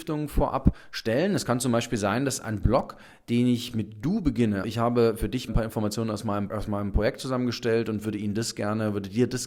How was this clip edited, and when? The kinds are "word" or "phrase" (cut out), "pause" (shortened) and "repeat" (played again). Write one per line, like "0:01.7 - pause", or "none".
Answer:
0:04.6 - word
0:05.5 - word
0:06.5 - word